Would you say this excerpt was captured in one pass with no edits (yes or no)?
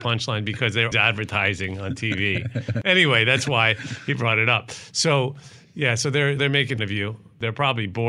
no